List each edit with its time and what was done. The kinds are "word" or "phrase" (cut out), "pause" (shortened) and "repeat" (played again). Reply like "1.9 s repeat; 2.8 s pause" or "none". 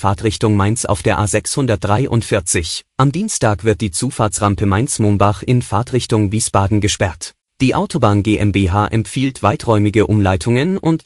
2.9 s pause; 7.4 s pause